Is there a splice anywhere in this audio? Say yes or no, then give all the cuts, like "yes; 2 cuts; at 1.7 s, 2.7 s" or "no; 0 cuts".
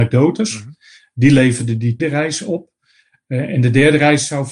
yes; 1 cut; at 2.0 s